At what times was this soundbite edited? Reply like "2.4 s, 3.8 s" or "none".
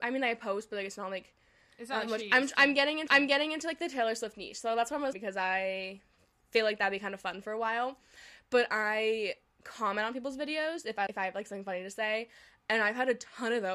3.1 s, 5.1 s, 11.1 s